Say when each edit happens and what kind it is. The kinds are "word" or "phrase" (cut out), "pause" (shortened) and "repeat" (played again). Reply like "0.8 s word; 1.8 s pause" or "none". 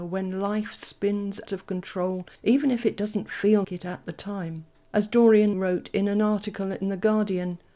1.5 s word; 2.4 s pause; 3.6 s word; 4.7 s pause; 5.5 s word